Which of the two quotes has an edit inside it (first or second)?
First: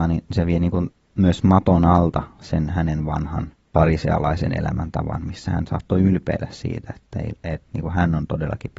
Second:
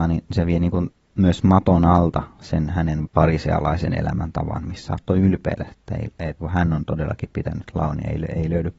second